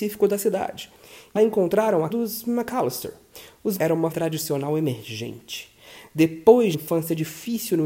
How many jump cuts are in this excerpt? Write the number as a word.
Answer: five